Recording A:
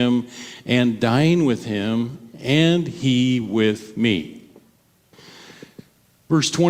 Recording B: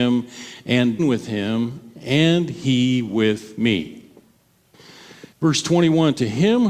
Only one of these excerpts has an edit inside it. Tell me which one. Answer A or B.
B